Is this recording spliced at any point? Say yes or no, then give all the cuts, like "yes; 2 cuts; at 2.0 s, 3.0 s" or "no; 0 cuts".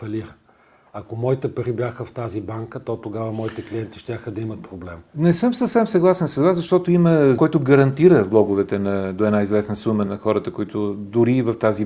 yes; 2 cuts; at 7.4 s, 10.1 s